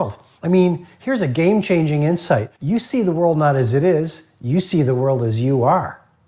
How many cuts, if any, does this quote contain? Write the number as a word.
one